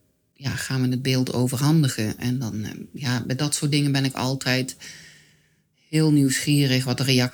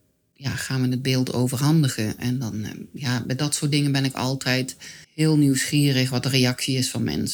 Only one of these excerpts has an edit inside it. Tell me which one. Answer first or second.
second